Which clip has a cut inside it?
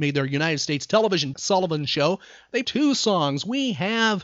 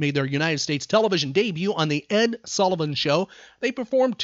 first; 2 cuts; at 1.3 s, 2.6 s

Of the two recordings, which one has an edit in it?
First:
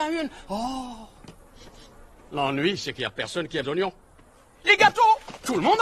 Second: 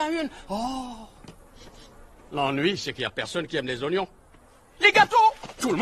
first; 1 cut; at 3.6 s

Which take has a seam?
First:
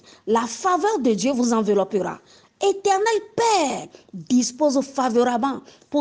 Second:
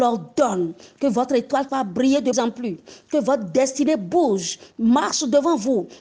second; 2 cuts; at 1.7 s, 2.3 s

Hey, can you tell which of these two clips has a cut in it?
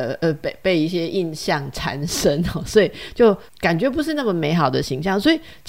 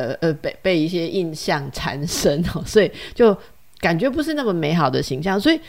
first; 1 cut; at 3.5 s

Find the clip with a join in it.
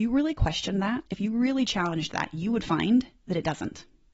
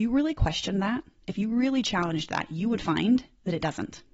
first; 1 cut; at 1.1 s

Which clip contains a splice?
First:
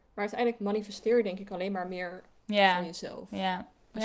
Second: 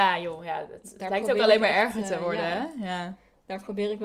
first; 1 cut; at 2.4 s

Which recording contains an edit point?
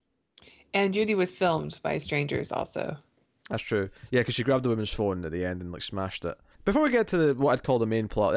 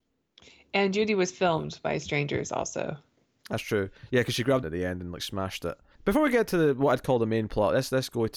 second; 1 cut; at 4.6 s

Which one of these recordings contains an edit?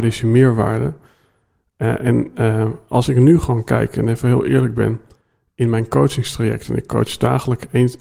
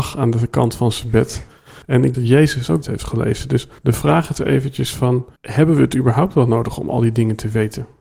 second; 5 cuts; at 1.8 s, 2.1 s, 2.8 s, 3.8 s, 5.4 s

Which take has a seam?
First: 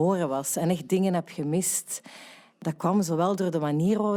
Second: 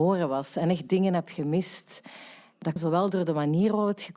second; 1 cut; at 2.8 s

